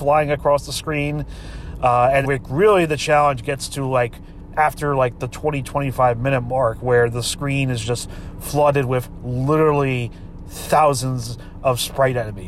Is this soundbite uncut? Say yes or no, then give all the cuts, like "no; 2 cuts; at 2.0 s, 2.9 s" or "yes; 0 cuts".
no; 1 cut; at 2.2 s